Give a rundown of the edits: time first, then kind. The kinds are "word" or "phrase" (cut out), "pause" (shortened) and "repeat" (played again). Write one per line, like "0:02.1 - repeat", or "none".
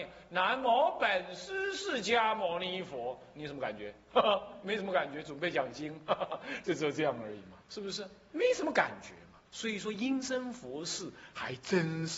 0:07.6 - pause
0:09.5 - pause

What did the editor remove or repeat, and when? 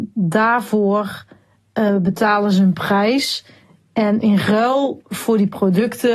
none

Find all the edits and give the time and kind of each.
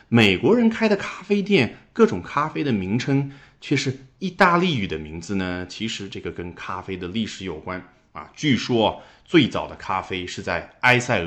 none

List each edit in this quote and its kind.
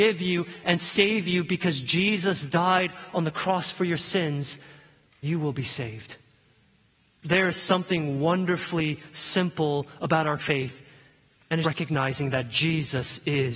0:05.2 - word
0:10.4 - word
0:11.6 - word

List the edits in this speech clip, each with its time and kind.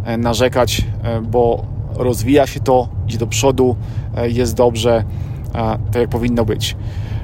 none

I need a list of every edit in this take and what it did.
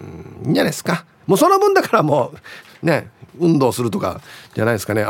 0:03.3 - pause

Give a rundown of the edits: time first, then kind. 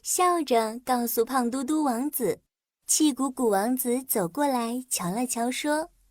0:02.6 - pause

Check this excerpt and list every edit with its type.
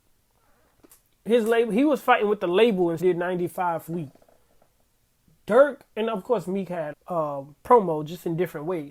0:03.0 - word
0:03.9 - word
0:06.9 - word

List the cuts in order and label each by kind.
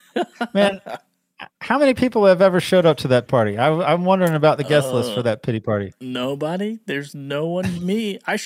0:01.5 - pause
0:03.3 - word

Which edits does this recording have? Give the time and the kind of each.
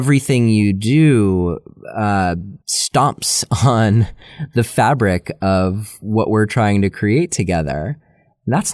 0:02.6 - pause

